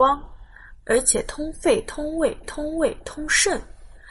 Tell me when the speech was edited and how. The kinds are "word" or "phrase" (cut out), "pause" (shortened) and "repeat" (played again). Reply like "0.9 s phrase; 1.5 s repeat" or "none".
2.4 s repeat